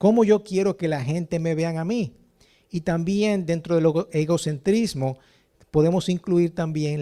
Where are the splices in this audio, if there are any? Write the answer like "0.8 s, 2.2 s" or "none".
none